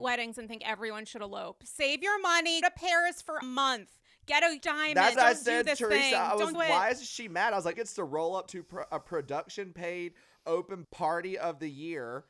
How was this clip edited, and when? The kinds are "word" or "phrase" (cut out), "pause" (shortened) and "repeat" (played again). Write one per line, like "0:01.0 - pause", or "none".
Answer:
0:02.6 - word
0:03.4 - word
0:04.6 - word
0:05.2 - word
0:06.5 - word
0:07.7 - word
0:10.8 - word